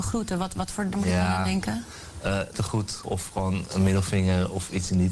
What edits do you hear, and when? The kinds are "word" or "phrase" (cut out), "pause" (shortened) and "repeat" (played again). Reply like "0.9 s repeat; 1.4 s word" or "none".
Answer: 0.9 s word; 2.5 s word; 3.0 s word